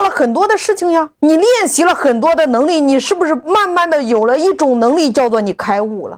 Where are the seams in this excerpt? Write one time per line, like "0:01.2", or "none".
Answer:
0:01.2